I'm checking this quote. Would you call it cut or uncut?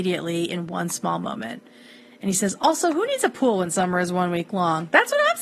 uncut